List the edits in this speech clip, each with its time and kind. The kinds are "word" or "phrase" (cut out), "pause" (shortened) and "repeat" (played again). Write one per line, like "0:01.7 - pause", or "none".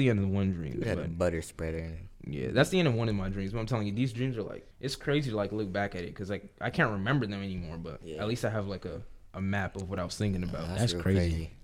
0:04.7 - pause